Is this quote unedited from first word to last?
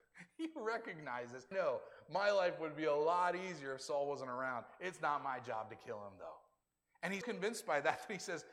no; 3 cuts; at 1.5 s, 6.6 s, 7.2 s

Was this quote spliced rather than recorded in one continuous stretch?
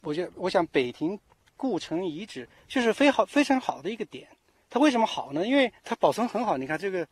yes; 1 cut; at 5.8 s

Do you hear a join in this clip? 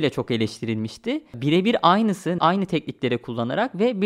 yes; 1 cut; at 2.4 s

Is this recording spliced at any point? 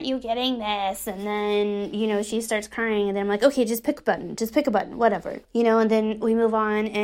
yes; 1 cut; at 5.4 s

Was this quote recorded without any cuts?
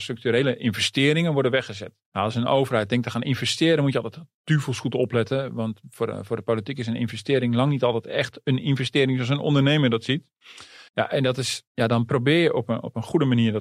no; 3 cuts; at 2.0 s, 10.9 s, 11.7 s

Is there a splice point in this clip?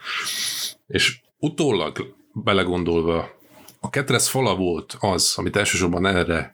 yes; 1 cut; at 1.3 s

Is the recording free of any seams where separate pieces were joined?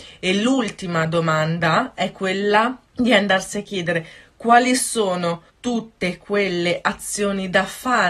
no; 2 cuts; at 2.8 s, 5.5 s

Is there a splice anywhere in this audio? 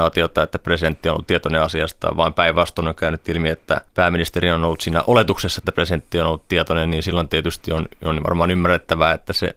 yes; 1 cut; at 3.9 s

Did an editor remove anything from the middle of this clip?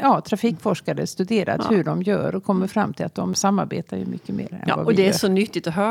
no; 0 cuts

